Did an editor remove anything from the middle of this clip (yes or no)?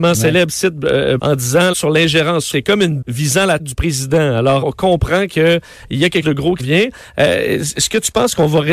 yes